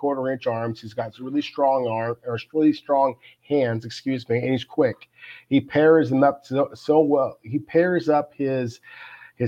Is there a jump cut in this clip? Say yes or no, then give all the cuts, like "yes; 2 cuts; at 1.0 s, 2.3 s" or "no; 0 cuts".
no; 0 cuts